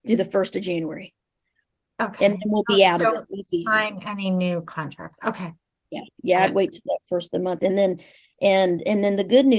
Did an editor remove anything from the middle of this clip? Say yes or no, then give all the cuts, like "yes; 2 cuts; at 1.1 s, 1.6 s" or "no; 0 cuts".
no; 0 cuts